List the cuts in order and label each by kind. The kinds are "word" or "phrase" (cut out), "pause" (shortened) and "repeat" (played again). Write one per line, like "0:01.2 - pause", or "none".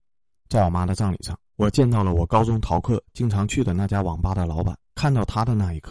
0:01.4 - pause
0:04.9 - pause